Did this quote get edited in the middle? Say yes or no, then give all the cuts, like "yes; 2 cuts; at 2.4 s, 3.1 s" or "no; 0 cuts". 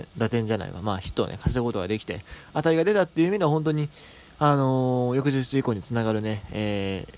no; 0 cuts